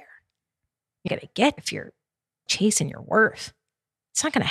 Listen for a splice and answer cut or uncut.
cut